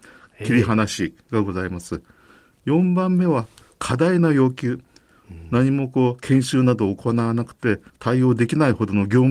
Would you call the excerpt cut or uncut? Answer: cut